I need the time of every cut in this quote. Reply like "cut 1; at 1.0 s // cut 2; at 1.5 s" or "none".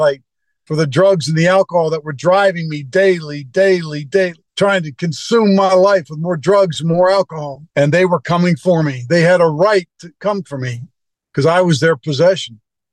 cut 1; at 4.5 s // cut 2; at 7.7 s // cut 3; at 11.1 s